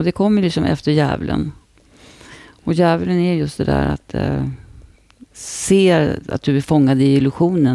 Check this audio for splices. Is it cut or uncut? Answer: uncut